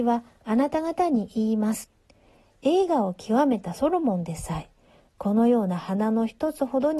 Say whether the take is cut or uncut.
uncut